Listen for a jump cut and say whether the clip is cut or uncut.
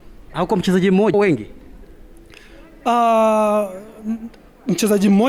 cut